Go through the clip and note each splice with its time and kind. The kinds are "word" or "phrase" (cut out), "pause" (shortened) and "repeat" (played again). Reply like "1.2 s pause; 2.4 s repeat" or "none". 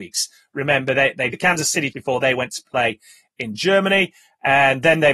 1.3 s word; 1.9 s word